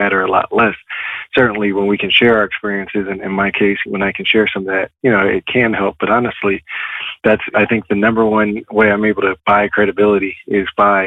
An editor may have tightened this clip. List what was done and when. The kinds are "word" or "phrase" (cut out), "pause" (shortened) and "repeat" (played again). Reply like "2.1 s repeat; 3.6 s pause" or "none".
none